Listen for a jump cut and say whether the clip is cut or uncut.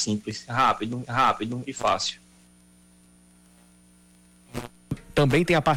cut